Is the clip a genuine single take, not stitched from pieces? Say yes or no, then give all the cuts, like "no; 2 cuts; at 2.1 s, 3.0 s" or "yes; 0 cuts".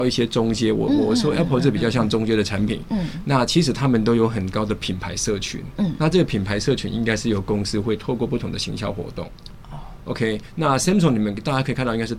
yes; 0 cuts